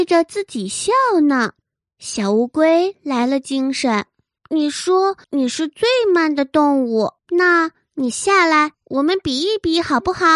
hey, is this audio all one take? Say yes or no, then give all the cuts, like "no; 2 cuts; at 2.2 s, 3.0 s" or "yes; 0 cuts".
no; 5 cuts; at 1.6 s, 4.4 s, 5.2 s, 7.2 s, 8.7 s